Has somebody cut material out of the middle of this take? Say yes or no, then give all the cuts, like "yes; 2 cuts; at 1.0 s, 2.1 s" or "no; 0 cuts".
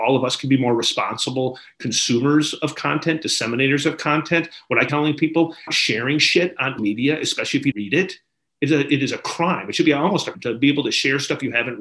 yes; 5 cuts; at 4.9 s, 5.7 s, 6.8 s, 7.7 s, 10.3 s